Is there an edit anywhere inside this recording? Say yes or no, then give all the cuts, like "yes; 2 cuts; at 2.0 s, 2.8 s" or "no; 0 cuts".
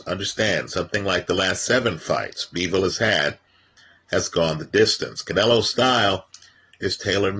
no; 0 cuts